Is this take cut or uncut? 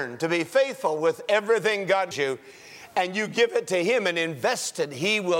cut